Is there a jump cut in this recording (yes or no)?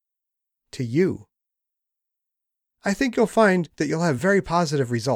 no